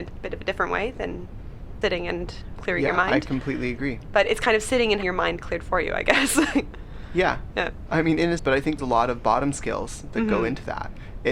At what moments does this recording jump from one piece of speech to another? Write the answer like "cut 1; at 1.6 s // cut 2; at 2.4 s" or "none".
cut 1; at 1.8 s // cut 2; at 5.0 s // cut 3; at 8.4 s // cut 4; at 8.8 s